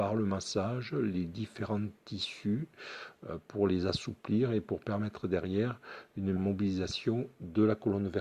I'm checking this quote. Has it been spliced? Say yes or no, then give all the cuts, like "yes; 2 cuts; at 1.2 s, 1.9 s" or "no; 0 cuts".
yes; 1 cut; at 6.4 s